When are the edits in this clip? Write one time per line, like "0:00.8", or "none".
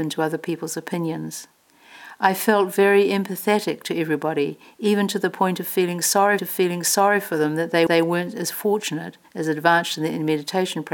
0:06.4
0:07.9
0:09.2